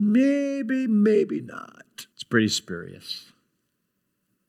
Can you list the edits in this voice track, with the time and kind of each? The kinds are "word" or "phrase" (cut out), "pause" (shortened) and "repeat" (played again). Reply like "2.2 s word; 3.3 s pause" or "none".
2.1 s pause